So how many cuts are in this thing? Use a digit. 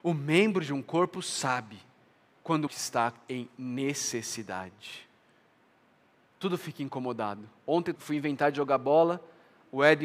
2